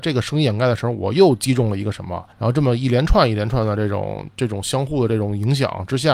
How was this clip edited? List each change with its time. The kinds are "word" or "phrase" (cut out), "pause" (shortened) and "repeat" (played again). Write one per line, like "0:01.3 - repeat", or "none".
0:02.3 - pause